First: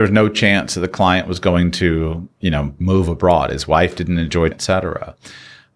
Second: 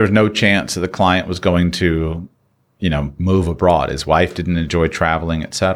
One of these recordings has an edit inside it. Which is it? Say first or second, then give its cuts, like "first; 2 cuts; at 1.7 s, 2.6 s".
first; 2 cuts; at 2.3 s, 4.5 s